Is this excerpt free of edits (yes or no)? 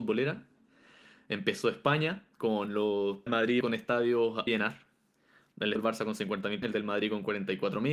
no